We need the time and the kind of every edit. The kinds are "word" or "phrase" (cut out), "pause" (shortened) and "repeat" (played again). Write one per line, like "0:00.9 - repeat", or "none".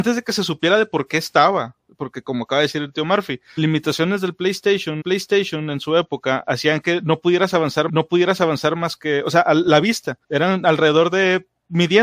0:03.6 - word
0:05.0 - repeat
0:07.9 - repeat
0:10.2 - pause